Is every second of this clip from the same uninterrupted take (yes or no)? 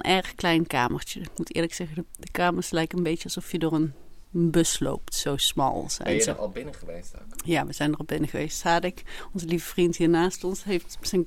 yes